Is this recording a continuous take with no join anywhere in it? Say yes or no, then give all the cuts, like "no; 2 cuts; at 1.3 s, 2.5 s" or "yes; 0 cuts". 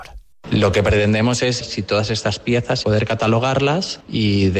no; 2 cuts; at 1.6 s, 2.8 s